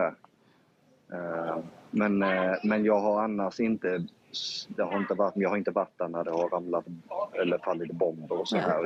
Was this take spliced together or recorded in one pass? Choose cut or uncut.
cut